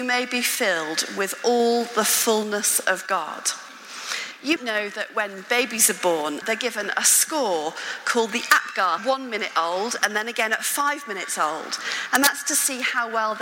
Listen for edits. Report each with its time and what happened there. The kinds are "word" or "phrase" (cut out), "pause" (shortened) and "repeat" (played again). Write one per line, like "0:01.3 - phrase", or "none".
0:04.6 - word
0:06.4 - word
0:09.0 - phrase

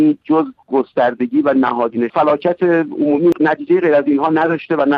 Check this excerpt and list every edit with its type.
0:02.1 - phrase

